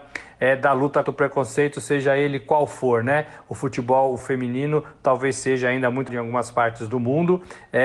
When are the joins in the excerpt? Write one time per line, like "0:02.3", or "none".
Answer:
0:01.0
0:04.2
0:06.1